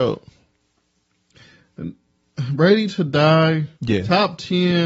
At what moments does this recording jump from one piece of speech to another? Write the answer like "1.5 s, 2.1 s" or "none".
3.7 s